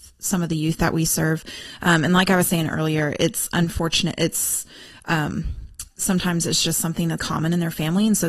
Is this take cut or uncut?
cut